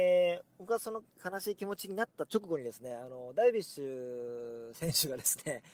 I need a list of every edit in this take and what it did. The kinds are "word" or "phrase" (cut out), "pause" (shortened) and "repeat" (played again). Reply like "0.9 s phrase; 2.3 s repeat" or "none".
1.1 s pause